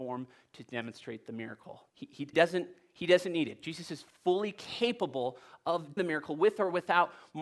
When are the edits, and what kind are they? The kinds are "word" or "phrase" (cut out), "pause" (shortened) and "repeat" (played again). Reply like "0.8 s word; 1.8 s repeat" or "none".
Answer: 1.9 s pause; 2.3 s word; 6.0 s word